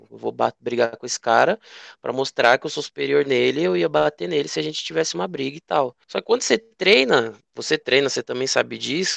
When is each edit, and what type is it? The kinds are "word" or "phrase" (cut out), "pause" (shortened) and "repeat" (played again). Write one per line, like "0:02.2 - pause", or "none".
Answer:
none